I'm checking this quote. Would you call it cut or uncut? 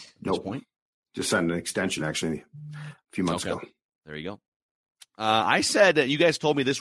uncut